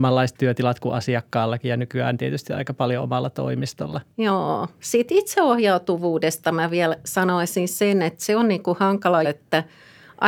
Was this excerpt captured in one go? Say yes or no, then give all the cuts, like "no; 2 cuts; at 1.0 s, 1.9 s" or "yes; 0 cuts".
no; 2 cuts; at 4.1 s, 9.2 s